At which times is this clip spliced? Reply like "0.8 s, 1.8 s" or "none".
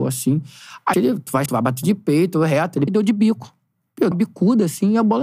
0.9 s, 1.5 s, 2.9 s, 4.1 s